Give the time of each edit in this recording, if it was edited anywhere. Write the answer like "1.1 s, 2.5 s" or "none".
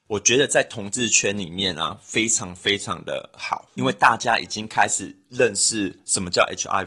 3.8 s